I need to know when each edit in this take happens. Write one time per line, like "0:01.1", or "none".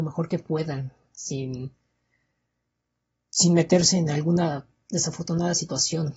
none